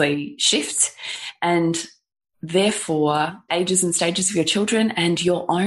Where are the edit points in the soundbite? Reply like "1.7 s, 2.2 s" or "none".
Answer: 3.5 s